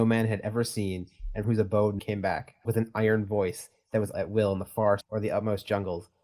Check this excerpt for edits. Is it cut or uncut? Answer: cut